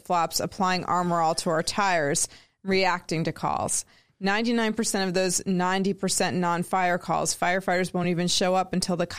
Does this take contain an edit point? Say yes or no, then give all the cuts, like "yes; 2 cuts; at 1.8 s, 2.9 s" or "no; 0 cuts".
no; 0 cuts